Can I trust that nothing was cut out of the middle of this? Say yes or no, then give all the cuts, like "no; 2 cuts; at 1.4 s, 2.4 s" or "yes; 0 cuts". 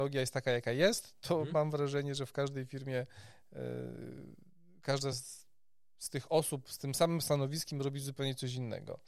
yes; 0 cuts